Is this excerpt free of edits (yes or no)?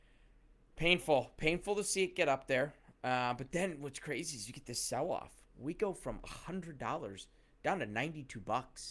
yes